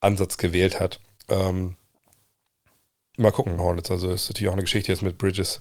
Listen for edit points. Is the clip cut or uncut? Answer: cut